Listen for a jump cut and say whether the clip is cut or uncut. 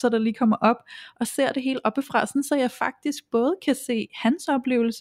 uncut